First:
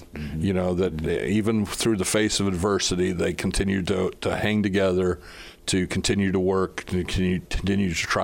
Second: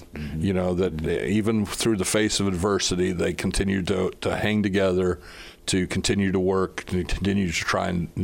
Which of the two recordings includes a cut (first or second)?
second